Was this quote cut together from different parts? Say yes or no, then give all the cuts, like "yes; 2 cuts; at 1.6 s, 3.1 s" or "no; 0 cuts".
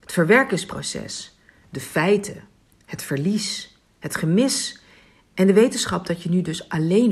no; 0 cuts